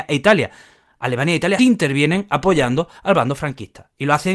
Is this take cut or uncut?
cut